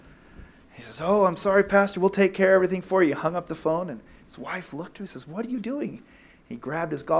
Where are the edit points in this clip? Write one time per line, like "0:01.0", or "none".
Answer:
none